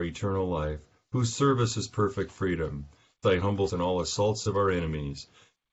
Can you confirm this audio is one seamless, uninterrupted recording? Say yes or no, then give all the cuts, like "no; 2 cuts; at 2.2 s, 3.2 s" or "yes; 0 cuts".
no; 2 cuts; at 3.2 s, 3.7 s